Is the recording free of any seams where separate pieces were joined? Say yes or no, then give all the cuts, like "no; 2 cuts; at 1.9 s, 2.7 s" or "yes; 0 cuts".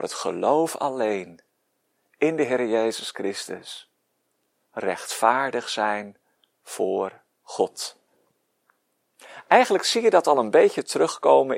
yes; 0 cuts